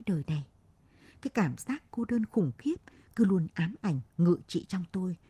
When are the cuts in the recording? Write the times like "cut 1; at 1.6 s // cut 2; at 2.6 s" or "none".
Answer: none